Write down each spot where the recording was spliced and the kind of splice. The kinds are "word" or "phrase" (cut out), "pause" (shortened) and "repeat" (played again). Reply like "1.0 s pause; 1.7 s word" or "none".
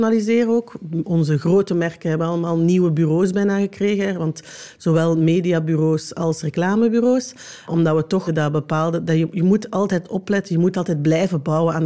8.3 s phrase